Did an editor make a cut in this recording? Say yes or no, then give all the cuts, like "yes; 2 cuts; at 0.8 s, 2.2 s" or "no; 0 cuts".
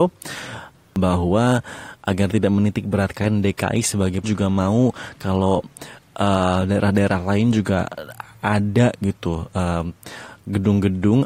yes; 1 cut; at 4.2 s